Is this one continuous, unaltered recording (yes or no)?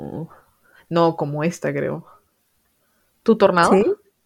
yes